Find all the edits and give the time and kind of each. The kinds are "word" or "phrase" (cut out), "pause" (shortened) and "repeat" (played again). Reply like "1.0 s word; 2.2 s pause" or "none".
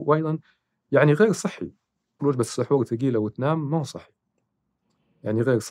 2.2 s word